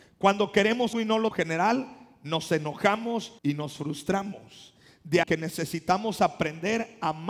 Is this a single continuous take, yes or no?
no